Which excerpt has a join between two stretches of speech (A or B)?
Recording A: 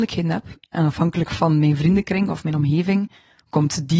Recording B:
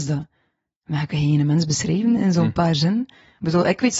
B